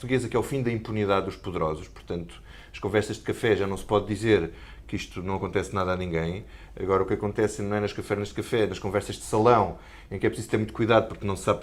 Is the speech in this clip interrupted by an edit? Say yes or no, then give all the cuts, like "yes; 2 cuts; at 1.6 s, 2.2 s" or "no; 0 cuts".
no; 0 cuts